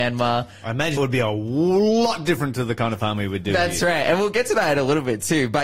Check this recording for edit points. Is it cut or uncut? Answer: cut